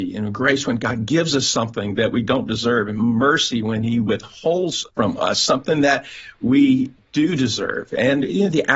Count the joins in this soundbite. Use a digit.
1